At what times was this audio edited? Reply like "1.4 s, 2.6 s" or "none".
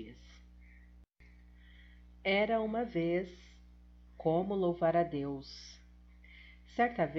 none